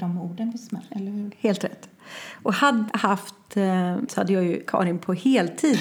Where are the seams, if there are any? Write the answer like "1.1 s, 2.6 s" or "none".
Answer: 2.9 s, 4.1 s, 4.7 s